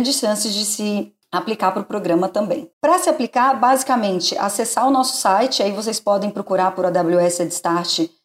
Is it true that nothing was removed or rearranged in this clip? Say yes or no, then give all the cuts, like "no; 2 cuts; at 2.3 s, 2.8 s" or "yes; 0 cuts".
no; 1 cut; at 2.7 s